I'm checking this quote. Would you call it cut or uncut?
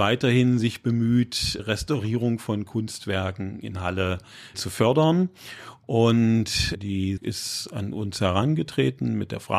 cut